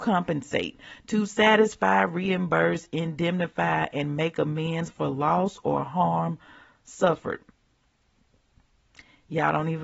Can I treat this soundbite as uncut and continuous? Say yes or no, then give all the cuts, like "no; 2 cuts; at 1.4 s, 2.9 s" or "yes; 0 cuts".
yes; 0 cuts